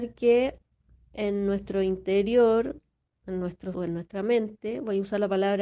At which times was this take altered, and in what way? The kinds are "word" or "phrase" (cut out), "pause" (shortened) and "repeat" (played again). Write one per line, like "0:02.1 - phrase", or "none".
0:03.7 - word